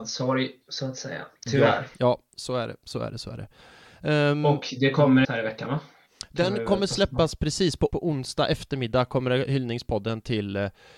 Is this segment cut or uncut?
cut